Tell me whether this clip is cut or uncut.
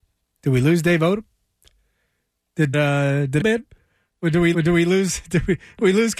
cut